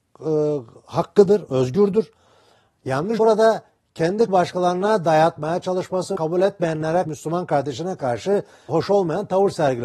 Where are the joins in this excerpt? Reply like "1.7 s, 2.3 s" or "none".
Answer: 3.2 s, 4.3 s, 6.1 s, 7.0 s, 8.7 s